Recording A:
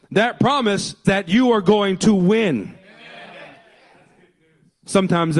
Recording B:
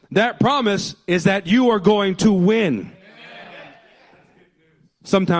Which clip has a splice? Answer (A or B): A